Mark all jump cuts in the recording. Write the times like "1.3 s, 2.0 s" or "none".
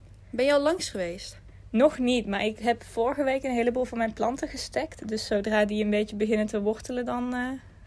none

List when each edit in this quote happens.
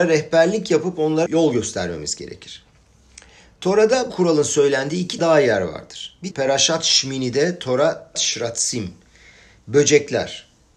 1.3 s, 4.1 s, 5.2 s, 6.3 s, 8.1 s

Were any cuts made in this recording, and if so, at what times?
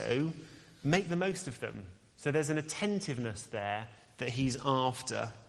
none

